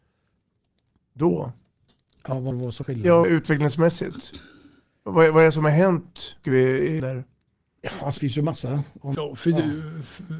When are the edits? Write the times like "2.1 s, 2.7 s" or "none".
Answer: 2.5 s, 2.8 s, 3.2 s, 6.4 s, 7.0 s, 8.2 s, 9.1 s